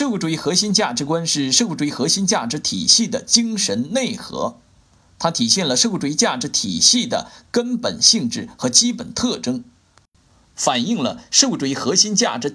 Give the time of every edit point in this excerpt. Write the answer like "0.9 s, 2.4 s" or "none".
none